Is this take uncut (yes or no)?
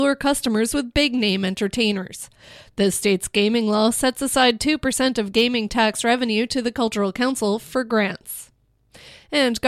yes